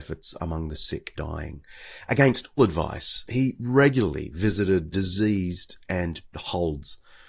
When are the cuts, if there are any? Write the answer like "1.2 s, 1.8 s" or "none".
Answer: 1.2 s, 2.6 s, 4.9 s, 6.3 s